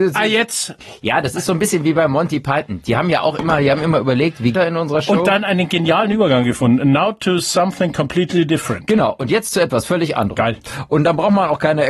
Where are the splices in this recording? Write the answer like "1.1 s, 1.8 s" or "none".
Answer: 4.5 s